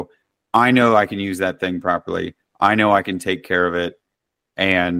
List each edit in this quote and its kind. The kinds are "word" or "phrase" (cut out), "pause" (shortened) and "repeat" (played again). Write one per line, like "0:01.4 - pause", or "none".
none